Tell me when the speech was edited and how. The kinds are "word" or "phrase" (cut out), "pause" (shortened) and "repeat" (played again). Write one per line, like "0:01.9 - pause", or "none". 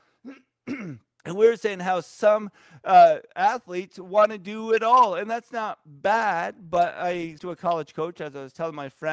0:01.2 - pause
0:07.4 - word